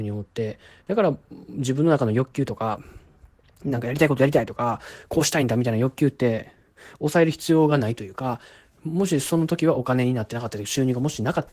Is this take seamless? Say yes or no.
yes